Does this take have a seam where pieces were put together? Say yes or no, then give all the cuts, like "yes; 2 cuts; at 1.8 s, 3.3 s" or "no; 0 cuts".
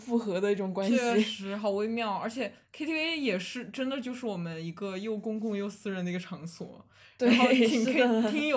no; 0 cuts